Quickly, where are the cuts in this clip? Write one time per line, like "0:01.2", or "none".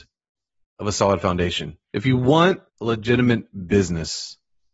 0:01.8
0:02.7